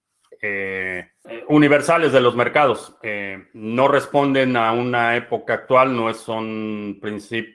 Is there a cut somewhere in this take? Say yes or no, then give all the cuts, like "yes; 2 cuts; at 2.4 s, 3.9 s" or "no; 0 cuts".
no; 0 cuts